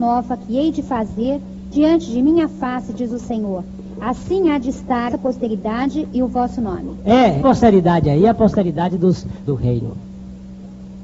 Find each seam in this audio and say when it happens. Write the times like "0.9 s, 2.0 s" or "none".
1.7 s, 5.1 s, 7.4 s, 9.5 s